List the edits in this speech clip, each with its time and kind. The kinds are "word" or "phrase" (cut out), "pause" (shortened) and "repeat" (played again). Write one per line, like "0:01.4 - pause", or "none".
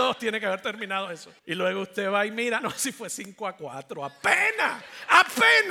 0:01.4 - pause
0:02.6 - word